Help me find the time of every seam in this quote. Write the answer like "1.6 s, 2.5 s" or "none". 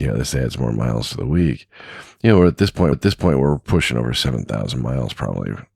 2.9 s

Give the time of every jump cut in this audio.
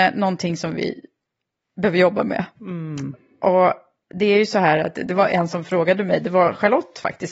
none

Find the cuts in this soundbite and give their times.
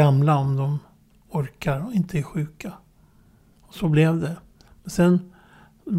none

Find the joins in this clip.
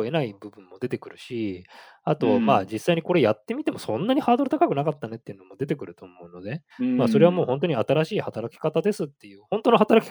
6.7 s

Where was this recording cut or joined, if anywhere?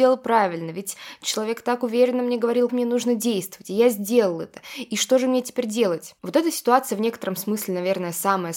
2.7 s

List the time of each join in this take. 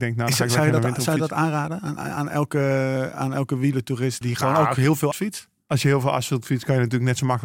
2.0 s, 4.2 s, 5.1 s

